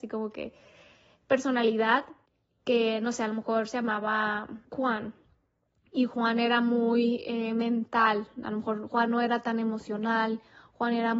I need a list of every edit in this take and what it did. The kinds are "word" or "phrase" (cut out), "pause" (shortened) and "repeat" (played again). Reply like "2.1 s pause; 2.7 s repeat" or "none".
2.3 s pause; 4.6 s pause